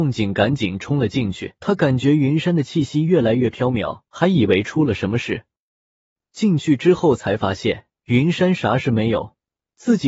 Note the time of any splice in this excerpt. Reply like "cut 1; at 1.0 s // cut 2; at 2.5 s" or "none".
cut 1; at 1.6 s // cut 2; at 4.1 s // cut 3; at 8.0 s